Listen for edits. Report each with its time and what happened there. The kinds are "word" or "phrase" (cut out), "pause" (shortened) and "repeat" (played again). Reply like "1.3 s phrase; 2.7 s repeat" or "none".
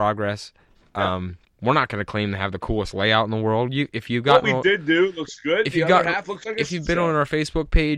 1.4 s pause